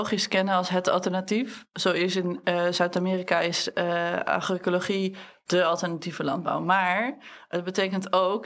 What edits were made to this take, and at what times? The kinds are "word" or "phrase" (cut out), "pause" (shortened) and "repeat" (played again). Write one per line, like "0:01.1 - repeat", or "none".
none